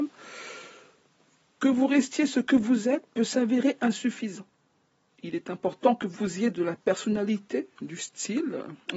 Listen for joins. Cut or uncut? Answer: uncut